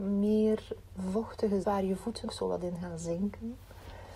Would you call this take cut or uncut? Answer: cut